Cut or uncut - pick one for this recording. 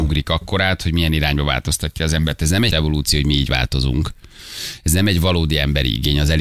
cut